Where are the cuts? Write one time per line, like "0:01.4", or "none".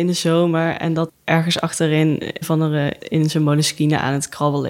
0:01.1
0:02.4
0:03.0